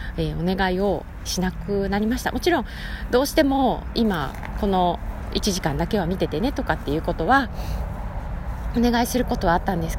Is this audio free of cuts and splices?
no; 1 cut; at 1.3 s

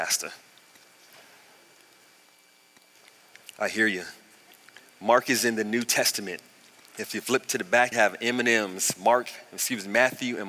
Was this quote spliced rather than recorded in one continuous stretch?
yes; 1 cut; at 7.9 s

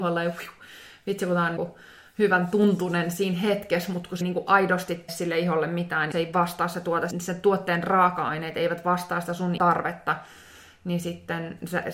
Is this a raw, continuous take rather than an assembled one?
no; 6 cuts; at 1.6 s, 4.2 s, 5.1 s, 6.1 s, 7.1 s, 9.6 s

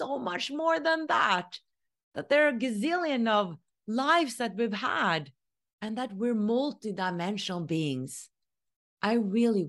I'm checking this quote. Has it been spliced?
no; 0 cuts

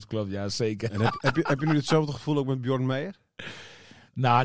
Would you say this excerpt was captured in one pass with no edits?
yes; 0 cuts

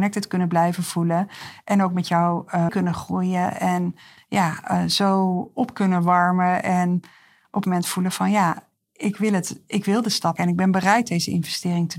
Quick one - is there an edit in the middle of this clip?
yes; 3 cuts; at 2.7 s, 7.6 s, 10.4 s

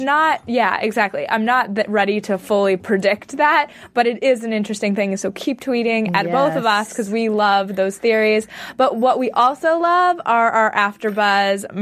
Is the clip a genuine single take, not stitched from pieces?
yes; 0 cuts

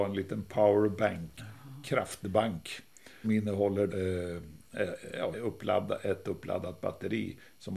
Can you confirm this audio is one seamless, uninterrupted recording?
no; 4 cuts; at 1.4 s, 3.2 s, 3.9 s, 5.3 s

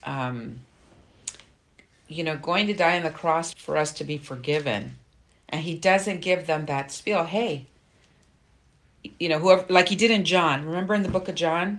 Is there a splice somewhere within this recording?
yes; 1 cut; at 3.5 s

